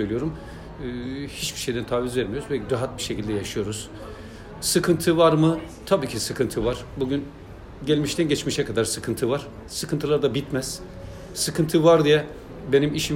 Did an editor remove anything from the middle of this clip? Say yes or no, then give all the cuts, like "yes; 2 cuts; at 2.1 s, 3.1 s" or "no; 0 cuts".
no; 0 cuts